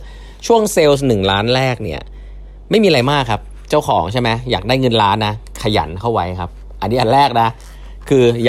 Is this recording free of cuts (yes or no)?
yes